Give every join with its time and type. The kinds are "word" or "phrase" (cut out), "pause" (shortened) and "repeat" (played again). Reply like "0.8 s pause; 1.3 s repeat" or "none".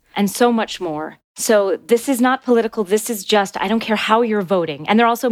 1.3 s pause